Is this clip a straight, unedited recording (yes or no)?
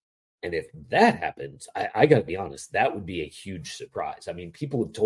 yes